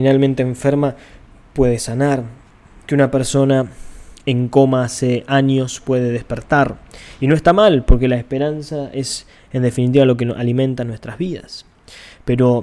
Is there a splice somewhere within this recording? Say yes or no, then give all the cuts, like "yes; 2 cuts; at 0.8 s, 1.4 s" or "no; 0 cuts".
no; 0 cuts